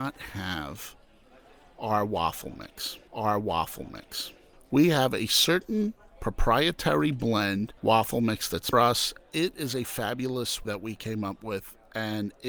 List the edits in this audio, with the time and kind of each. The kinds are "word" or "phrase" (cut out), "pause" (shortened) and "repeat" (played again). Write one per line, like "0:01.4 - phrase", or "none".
0:03.1 - repeat
0:07.8 - pause
0:08.7 - phrase
0:10.6 - word

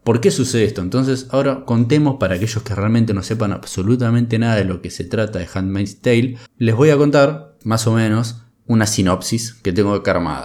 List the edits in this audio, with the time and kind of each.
0:06.5 - pause
0:07.6 - pause

